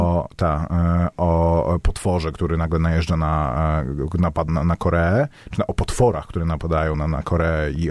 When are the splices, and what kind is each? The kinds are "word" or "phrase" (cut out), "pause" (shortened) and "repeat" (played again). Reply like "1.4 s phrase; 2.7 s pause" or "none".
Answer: 4.5 s word; 6.9 s word